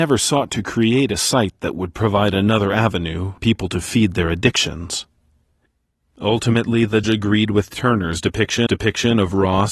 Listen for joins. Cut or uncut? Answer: cut